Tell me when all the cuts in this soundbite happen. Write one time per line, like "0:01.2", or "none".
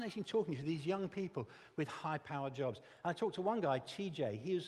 none